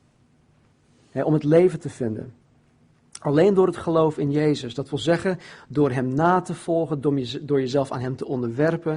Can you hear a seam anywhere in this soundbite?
no; 0 cuts

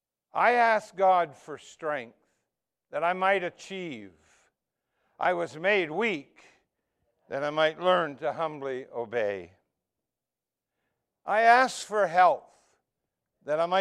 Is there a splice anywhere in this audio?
no; 0 cuts

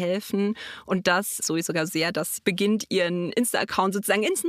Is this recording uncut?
no; 3 cuts; at 1.4 s, 1.9 s, 2.4 s

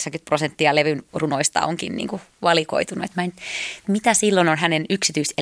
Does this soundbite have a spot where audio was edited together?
yes; 1 cut; at 3.8 s

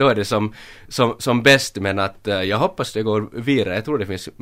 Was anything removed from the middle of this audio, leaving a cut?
no; 0 cuts

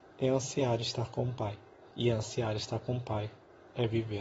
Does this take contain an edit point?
yes; 1 cut; at 1.9 s

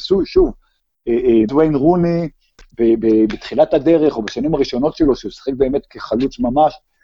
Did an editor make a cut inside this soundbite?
yes; 1 cut; at 1.5 s

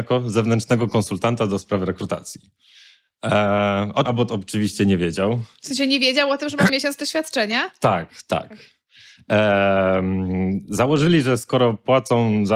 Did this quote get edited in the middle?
yes; 2 cuts; at 4.1 s, 6.7 s

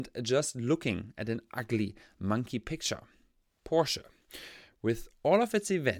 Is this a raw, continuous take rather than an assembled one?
yes; 0 cuts

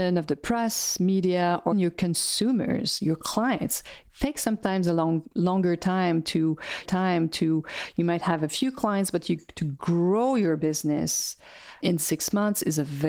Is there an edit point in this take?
yes; 3 cuts; at 1.7 s, 6.8 s, 11.8 s

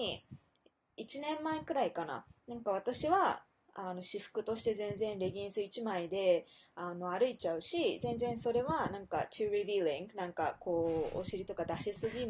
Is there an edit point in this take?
no; 0 cuts

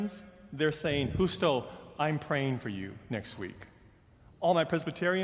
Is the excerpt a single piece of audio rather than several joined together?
yes; 0 cuts

